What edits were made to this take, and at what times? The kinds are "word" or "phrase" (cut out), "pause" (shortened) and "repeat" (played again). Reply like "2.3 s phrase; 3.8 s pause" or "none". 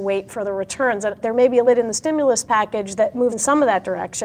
1.2 s word; 1.6 s word; 3.3 s word

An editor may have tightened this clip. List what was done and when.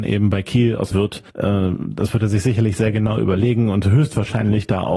0.9 s phrase; 1.3 s pause

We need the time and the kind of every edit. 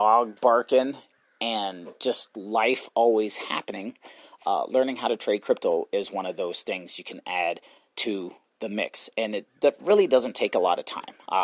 none

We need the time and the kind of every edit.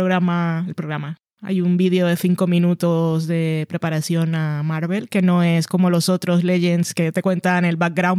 none

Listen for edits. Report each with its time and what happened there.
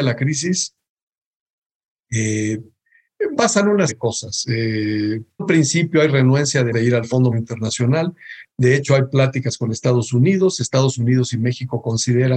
3.4 s word; 3.9 s word; 5.4 s word; 6.7 s word; 7.3 s word

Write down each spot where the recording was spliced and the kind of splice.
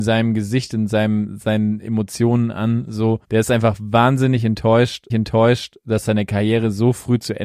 3.2 s pause; 5.1 s repeat

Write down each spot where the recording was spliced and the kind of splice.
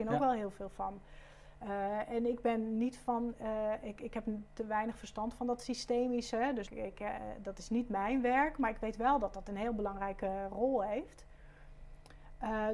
6.7 s word

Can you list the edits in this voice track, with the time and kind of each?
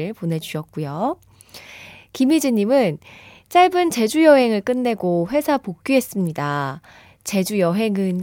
none

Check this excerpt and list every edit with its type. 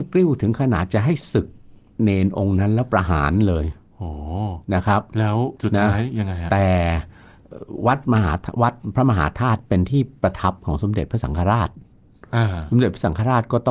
5.6 s pause

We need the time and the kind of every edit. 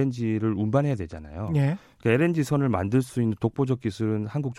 none

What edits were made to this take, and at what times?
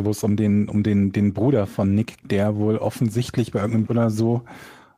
1.1 s word; 2.2 s word; 3.9 s word

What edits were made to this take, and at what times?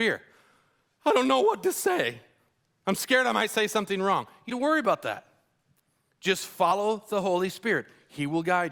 4.5 s phrase

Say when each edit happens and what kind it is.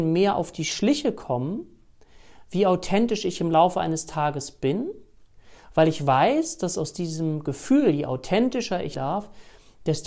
8.9 s word

